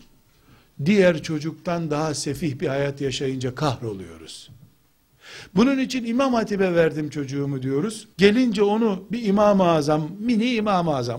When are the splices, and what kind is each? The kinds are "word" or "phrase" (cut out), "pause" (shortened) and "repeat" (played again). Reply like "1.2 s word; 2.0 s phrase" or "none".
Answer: 8.1 s pause